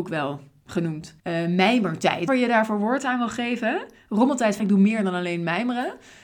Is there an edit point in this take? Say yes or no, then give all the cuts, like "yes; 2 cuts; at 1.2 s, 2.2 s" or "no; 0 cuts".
yes; 3 cuts; at 1.2 s, 2.3 s, 4.6 s